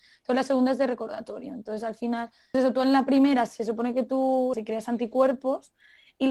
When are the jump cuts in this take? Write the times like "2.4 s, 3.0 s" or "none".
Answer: 2.5 s, 4.5 s